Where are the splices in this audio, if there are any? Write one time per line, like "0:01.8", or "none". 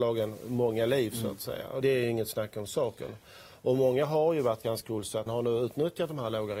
0:01.8
0:04.8
0:05.3